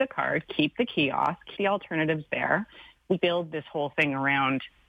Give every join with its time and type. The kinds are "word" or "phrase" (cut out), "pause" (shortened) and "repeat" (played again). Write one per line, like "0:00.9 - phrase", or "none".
0:01.6 - word
0:03.2 - word